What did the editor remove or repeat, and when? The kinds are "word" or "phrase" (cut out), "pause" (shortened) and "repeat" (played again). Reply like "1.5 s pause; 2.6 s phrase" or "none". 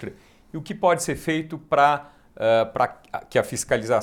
none